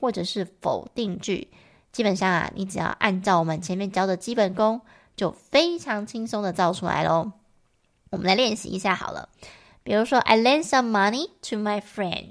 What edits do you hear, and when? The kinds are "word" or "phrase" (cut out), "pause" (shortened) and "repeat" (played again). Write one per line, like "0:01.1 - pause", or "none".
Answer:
none